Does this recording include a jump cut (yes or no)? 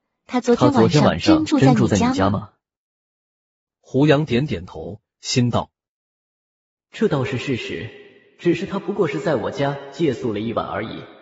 no